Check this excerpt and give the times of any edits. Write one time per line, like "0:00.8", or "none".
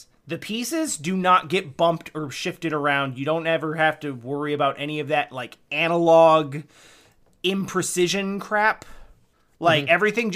none